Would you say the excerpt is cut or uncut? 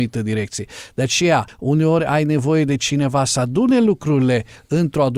uncut